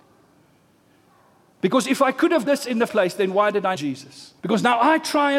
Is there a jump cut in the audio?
yes; 4 cuts; at 2.5 s, 2.9 s, 3.8 s, 4.4 s

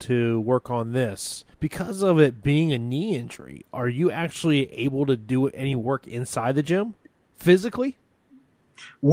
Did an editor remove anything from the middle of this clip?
yes; 1 cut; at 1.5 s

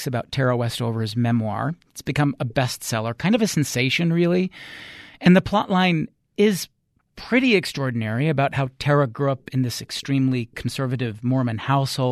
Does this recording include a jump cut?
no; 0 cuts

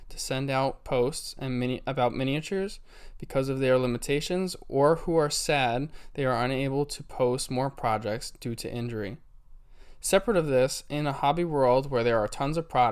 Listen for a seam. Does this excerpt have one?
no; 0 cuts

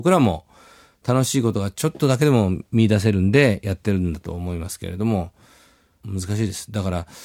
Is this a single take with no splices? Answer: yes; 0 cuts

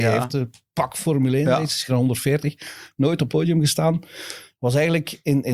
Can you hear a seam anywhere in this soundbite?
yes; 2 cuts; at 1.9 s, 3.3 s

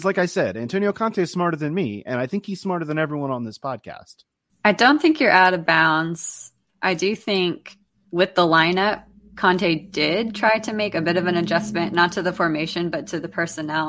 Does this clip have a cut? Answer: no; 0 cuts

